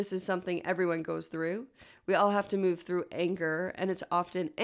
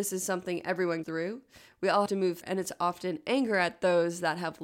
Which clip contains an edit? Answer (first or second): second